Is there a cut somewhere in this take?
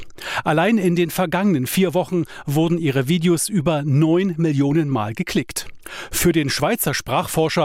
no; 0 cuts

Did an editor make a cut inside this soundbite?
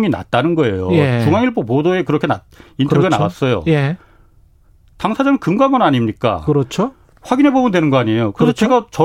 no; 0 cuts

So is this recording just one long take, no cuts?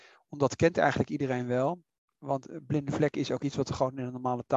yes; 0 cuts

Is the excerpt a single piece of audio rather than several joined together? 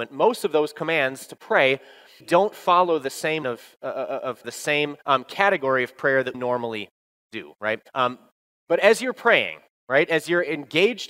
no; 6 cuts; at 2.2 s, 3.4 s, 4.4 s, 5.0 s, 6.3 s, 7.9 s

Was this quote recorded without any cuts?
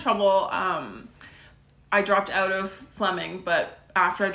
yes; 0 cuts

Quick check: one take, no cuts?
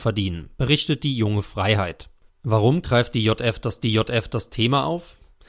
no; 2 cuts; at 2.3 s, 3.8 s

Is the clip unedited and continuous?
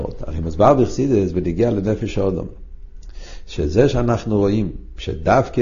yes; 0 cuts

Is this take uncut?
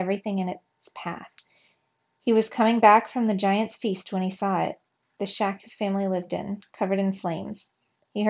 yes; 0 cuts

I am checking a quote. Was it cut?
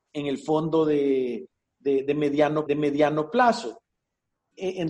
yes; 1 cut; at 2.7 s

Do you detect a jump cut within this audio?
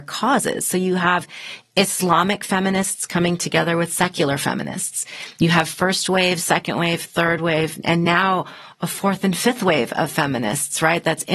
no; 0 cuts

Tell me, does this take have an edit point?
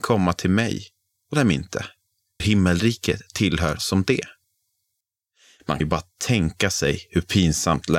yes; 4 cuts; at 1.3 s, 2.4 s, 3.8 s, 5.8 s

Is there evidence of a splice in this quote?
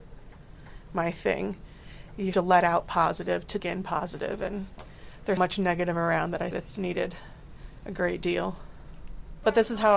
yes; 4 cuts; at 2.3 s, 3.6 s, 5.4 s, 6.5 s

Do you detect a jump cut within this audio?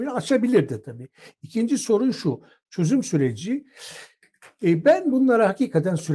no; 0 cuts

